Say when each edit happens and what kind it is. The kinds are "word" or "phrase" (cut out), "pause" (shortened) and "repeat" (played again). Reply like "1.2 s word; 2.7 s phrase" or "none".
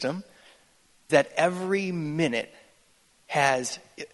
1.1 s word

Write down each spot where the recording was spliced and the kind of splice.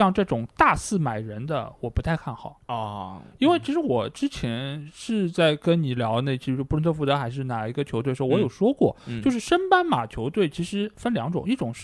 none

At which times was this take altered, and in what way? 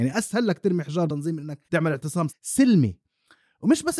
1.1 s word; 1.6 s pause; 2.3 s word

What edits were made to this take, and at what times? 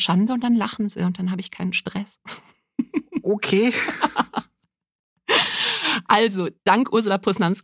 6.6 s pause

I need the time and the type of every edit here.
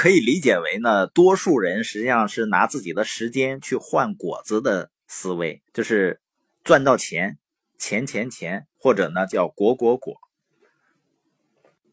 5.7 s pause; 8.8 s pause

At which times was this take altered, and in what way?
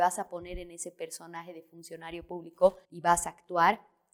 2.8 s pause

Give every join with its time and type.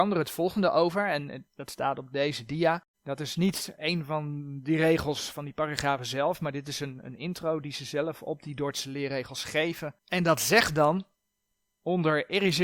1.5 s pause; 2.9 s pause; 10.0 s pause

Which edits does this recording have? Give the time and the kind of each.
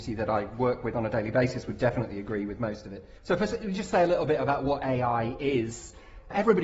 3.2 s pause

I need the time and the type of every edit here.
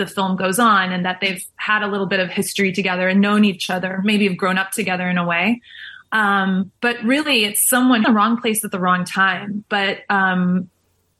6.8 s pause; 8.0 s phrase

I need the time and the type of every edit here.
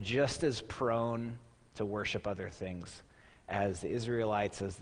none

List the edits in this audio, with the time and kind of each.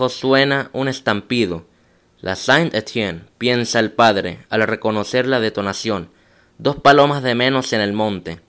none

